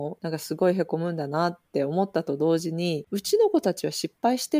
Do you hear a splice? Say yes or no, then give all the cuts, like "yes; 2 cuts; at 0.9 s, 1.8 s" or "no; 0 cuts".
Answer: no; 0 cuts